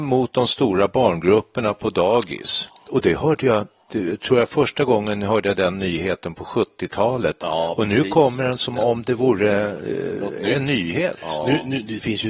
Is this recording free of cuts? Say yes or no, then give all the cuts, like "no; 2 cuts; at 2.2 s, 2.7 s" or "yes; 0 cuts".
yes; 0 cuts